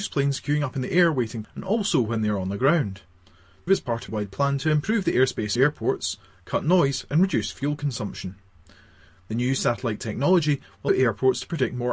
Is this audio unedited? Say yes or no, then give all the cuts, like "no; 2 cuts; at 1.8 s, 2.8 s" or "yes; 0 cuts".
no; 5 cuts; at 1.4 s, 3.7 s, 4.1 s, 5.6 s, 10.9 s